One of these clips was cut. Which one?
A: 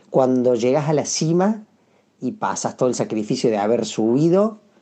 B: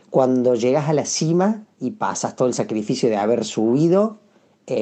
B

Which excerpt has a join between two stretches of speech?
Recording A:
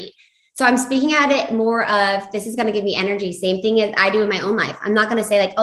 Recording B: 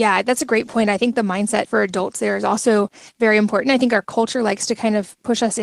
B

